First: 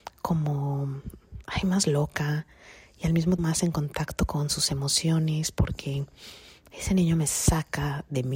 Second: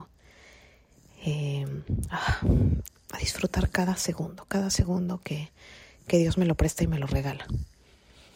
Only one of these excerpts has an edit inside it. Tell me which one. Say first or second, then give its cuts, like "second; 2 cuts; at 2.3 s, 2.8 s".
first; 1 cut; at 3.4 s